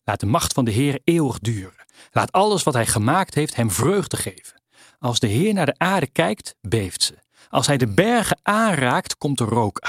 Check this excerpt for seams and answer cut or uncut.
uncut